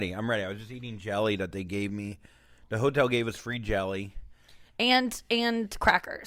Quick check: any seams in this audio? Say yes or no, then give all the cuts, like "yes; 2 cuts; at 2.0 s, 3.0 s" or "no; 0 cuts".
no; 0 cuts